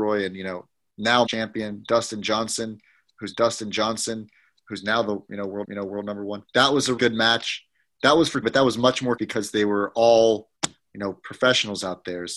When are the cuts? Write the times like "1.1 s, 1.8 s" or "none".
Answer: 1.3 s, 3.3 s, 5.6 s, 6.4 s, 7.0 s, 8.4 s, 9.2 s, 10.6 s

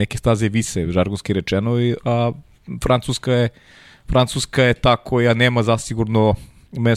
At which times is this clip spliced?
none

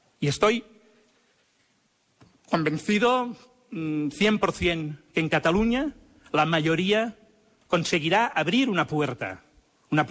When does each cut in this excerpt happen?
none

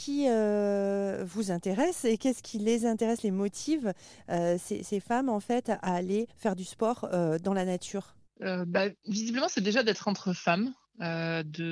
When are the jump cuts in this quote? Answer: 6.3 s, 8.3 s

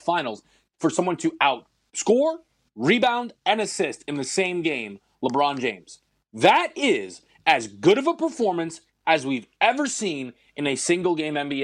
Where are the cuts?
none

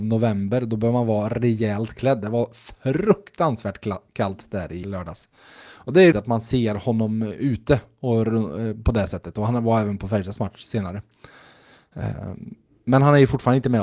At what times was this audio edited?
4.8 s, 6.1 s

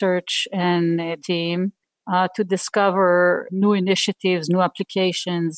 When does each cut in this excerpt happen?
1.2 s, 3.5 s

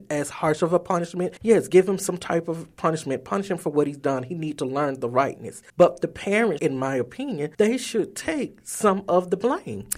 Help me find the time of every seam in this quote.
1.4 s, 5.7 s, 6.6 s, 7.5 s

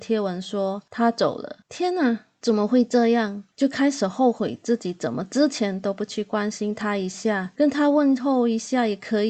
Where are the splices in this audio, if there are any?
1.6 s

